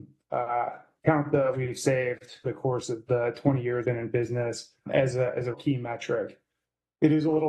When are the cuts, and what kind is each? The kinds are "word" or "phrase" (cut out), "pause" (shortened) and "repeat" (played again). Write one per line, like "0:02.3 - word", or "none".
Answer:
0:01.5 - word
0:02.4 - word
0:03.1 - word
0:03.8 - word
0:04.9 - word
0:05.5 - word